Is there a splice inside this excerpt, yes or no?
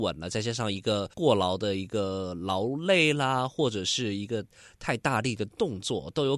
yes